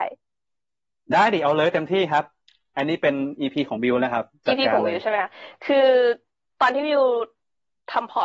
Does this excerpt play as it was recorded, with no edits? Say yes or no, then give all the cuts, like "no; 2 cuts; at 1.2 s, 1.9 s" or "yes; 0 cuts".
yes; 0 cuts